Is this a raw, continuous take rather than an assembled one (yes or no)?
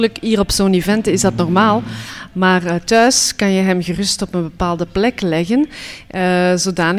yes